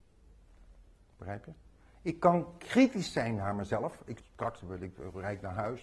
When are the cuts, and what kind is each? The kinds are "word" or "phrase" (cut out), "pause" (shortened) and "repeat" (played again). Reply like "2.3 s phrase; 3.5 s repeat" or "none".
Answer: 4.2 s phrase